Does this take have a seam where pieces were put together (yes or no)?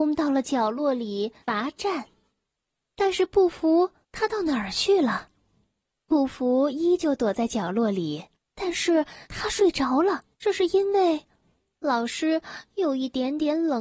yes